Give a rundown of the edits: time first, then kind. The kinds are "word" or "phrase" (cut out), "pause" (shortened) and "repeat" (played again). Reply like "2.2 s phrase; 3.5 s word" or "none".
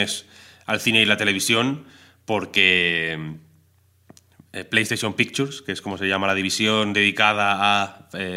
none